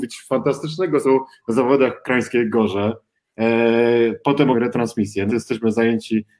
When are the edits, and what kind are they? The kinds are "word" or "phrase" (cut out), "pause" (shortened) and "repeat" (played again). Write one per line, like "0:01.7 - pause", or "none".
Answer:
0:01.0 - word
0:04.5 - word
0:05.3 - word